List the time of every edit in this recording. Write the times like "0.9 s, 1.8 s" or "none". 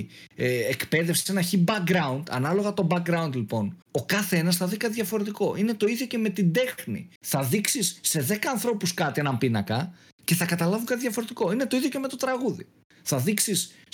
3.8 s, 7.2 s